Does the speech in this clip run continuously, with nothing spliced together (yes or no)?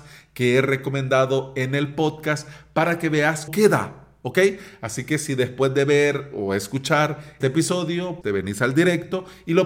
no